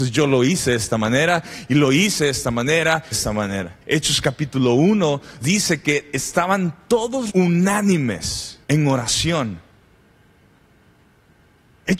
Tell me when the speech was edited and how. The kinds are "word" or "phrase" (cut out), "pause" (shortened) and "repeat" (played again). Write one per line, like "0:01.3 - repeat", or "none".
0:03.1 - phrase
0:03.8 - pause
0:05.4 - word
0:07.3 - word
0:08.6 - pause